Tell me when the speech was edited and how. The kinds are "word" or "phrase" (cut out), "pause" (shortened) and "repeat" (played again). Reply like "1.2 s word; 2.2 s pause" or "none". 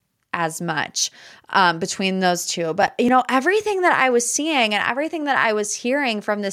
none